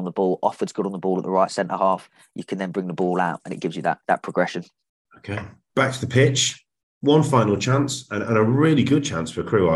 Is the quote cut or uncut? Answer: cut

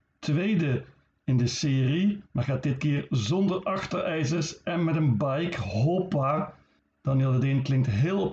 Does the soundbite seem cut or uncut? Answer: cut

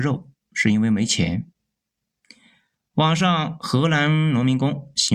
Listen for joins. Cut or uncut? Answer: uncut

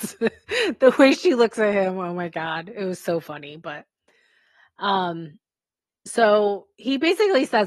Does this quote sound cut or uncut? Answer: uncut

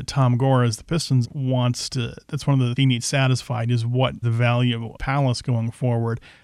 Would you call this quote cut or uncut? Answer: cut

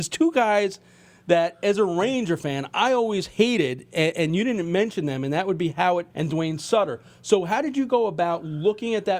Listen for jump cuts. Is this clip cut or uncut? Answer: cut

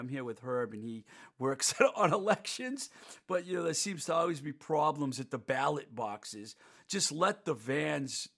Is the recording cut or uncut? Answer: uncut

